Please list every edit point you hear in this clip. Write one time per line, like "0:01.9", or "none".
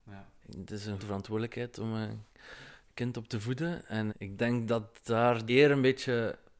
0:01.0
0:04.1
0:05.5